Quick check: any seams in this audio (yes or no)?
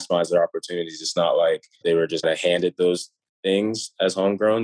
yes